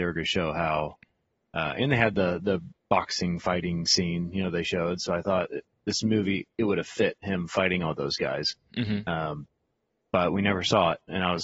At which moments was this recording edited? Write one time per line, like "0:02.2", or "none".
none